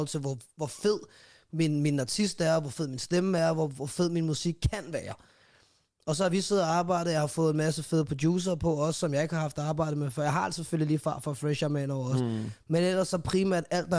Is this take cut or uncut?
uncut